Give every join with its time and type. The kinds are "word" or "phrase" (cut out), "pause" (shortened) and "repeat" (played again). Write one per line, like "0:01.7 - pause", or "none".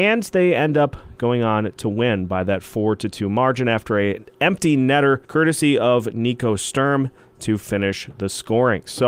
0:05.2 - pause

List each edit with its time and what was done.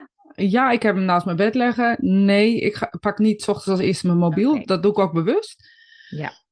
none

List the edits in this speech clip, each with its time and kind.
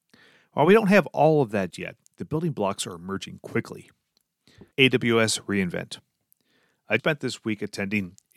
0:01.7 - word
0:04.7 - pause
0:07.0 - word

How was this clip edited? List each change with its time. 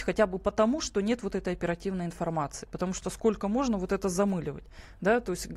none

